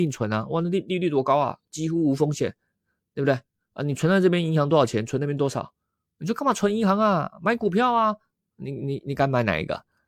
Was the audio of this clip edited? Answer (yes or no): no